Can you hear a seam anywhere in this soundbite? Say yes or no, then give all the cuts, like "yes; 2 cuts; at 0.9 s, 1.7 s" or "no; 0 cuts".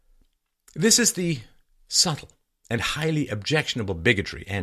no; 0 cuts